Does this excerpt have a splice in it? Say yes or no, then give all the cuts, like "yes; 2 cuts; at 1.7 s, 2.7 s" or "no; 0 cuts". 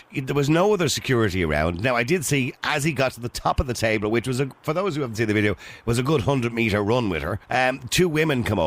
yes; 1 cut; at 7.4 s